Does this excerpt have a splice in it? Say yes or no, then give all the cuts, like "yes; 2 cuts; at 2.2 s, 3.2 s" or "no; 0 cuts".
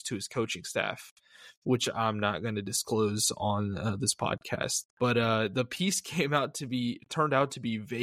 yes; 1 cut; at 4.9 s